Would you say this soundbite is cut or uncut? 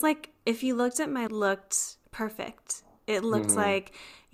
cut